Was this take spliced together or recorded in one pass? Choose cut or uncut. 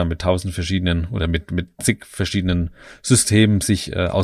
uncut